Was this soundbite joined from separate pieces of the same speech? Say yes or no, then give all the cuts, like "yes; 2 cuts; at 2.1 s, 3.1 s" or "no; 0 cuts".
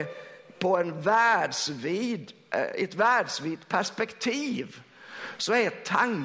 no; 0 cuts